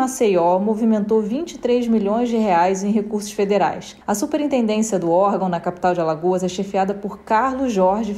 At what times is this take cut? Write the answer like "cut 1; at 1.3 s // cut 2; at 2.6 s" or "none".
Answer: cut 1; at 4.0 s